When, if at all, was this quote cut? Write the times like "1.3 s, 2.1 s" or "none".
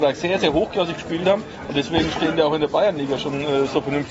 none